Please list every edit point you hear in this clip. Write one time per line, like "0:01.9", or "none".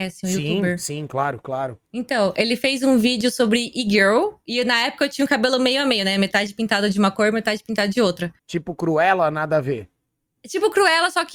0:08.4